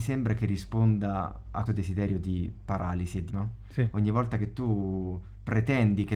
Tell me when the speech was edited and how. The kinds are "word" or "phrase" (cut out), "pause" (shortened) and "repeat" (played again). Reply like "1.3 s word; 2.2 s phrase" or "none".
1.7 s word; 3.3 s word